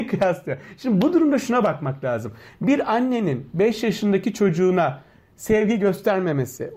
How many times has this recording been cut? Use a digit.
0